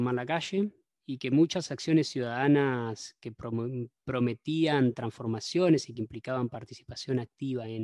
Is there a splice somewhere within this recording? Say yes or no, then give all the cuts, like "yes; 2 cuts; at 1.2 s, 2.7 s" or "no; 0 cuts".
no; 0 cuts